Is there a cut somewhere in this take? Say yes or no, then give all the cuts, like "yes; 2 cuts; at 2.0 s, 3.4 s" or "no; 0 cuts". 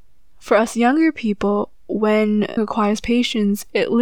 yes; 1 cut; at 2.6 s